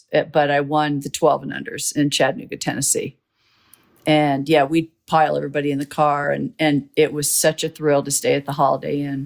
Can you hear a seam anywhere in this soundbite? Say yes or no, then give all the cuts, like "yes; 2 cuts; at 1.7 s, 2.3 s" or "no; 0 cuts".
no; 0 cuts